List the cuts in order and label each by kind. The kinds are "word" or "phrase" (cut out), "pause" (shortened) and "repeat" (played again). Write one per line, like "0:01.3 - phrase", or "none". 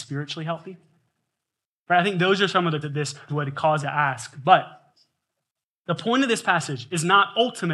0:02.8 - word
0:03.3 - word
0:03.8 - word